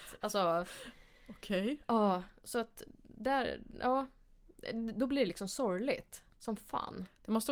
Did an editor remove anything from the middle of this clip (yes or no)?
no